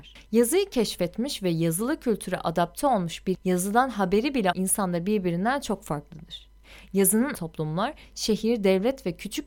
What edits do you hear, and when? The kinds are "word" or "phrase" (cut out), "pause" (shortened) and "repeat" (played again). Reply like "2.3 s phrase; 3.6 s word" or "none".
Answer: 3.3 s word; 4.5 s word; 7.3 s word